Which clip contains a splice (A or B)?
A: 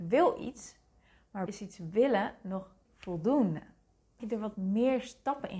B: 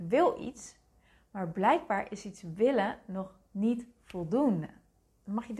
A